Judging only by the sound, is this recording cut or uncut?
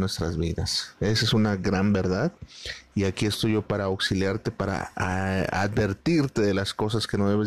uncut